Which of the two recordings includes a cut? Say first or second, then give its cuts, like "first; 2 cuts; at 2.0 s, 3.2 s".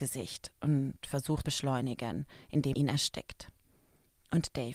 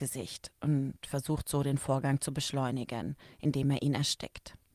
first; 2 cuts; at 1.4 s, 2.7 s